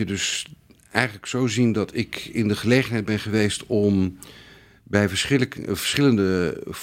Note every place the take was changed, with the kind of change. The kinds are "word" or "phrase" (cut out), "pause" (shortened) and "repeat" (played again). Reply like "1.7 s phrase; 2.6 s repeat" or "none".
none